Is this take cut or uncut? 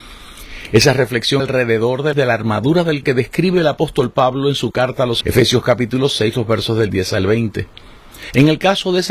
cut